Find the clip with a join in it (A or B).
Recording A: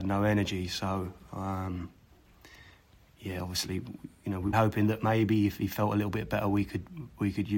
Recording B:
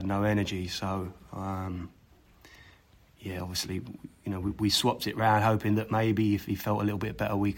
A